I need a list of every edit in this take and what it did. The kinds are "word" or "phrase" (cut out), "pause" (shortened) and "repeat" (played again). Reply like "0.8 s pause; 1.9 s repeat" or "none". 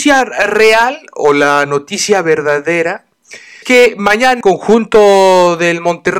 3.6 s word; 4.4 s word